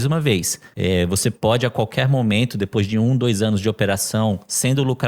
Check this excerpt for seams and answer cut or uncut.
uncut